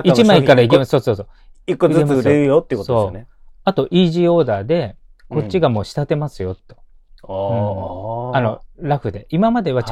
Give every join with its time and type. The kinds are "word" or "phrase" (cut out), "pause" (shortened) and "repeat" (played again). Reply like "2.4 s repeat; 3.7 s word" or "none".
none